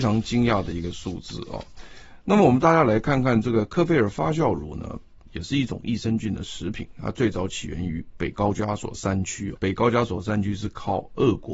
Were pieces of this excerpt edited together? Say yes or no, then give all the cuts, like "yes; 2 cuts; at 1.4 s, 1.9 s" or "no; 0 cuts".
yes; 1 cut; at 9.6 s